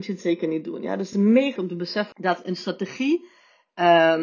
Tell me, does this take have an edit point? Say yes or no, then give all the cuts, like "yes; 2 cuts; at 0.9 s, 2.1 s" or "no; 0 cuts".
yes; 3 cuts; at 1.1 s, 1.6 s, 2.1 s